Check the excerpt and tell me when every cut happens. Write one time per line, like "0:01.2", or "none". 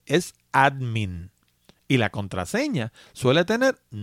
none